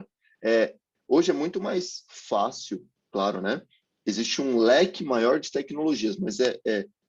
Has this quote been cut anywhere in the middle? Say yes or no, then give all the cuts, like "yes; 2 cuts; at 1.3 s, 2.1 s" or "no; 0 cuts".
no; 0 cuts